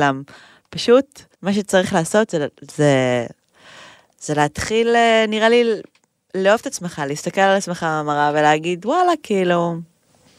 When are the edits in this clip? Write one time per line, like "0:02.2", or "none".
0:01.3